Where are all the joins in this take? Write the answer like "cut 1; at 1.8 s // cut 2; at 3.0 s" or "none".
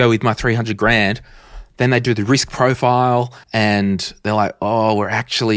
cut 1; at 3.4 s